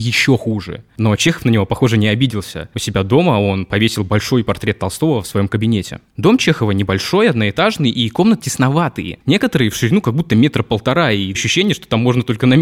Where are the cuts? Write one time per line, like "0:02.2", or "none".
0:06.1
0:08.4
0:11.3